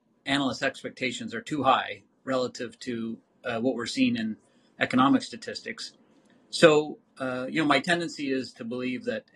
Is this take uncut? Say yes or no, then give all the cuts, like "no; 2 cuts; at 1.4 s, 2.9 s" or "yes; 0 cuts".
yes; 0 cuts